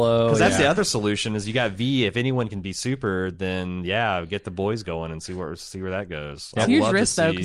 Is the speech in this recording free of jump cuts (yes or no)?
yes